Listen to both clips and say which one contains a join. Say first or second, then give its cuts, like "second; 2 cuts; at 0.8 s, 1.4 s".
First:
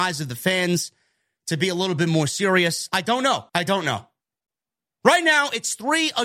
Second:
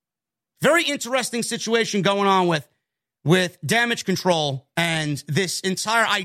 first; 1 cut; at 3.5 s